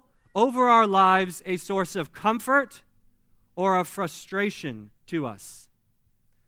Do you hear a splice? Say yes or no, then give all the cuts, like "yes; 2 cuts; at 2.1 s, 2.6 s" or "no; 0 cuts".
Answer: no; 0 cuts